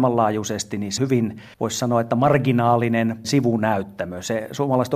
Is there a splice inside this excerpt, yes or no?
yes